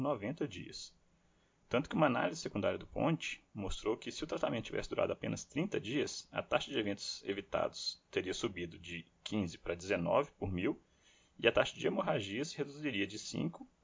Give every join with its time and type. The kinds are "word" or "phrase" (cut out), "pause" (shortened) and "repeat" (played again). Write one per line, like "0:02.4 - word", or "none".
none